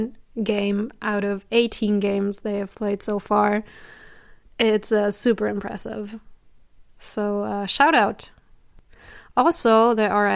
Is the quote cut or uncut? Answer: uncut